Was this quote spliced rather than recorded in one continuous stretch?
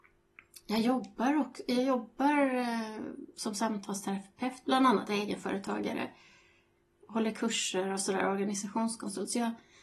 no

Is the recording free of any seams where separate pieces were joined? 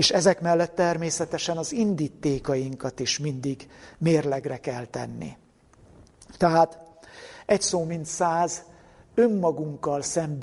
yes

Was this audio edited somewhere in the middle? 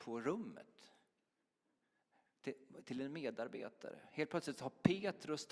no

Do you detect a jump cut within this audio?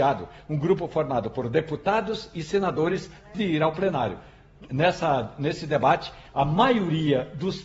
yes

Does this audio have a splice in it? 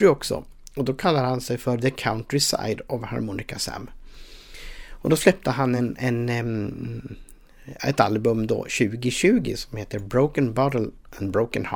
no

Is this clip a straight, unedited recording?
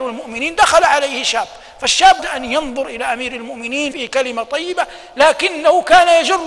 no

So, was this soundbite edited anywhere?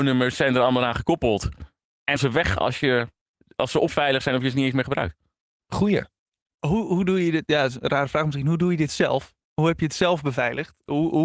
yes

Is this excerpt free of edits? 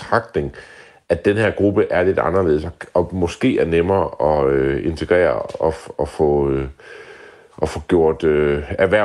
yes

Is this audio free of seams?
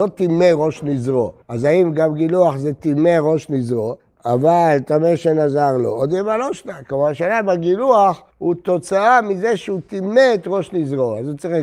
no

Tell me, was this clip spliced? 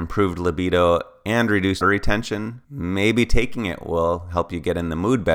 yes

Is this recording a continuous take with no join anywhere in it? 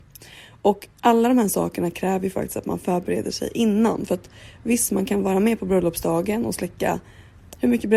no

